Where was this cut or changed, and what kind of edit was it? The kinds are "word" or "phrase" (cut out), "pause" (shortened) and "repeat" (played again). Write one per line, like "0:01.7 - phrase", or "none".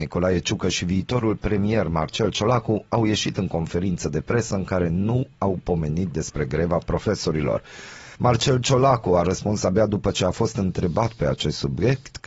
0:08.1 - pause